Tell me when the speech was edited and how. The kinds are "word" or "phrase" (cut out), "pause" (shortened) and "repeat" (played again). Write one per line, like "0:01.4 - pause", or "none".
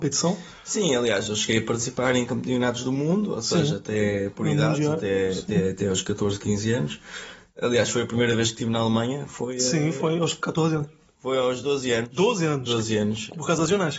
none